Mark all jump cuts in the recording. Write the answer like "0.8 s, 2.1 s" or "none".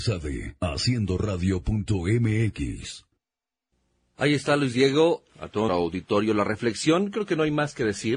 5.3 s, 5.7 s